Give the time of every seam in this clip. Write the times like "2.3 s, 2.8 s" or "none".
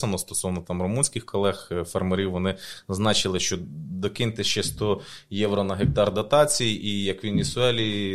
none